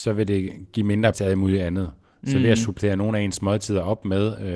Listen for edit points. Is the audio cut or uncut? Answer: cut